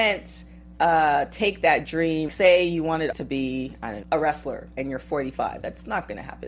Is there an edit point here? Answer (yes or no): yes